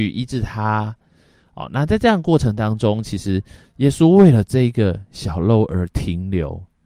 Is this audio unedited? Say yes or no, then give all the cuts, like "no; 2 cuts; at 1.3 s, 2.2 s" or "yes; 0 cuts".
yes; 0 cuts